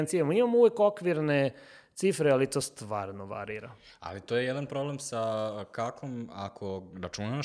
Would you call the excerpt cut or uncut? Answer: uncut